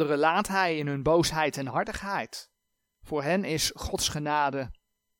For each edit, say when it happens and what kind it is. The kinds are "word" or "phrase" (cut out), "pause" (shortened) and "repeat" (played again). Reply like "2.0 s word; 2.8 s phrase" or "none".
2.8 s pause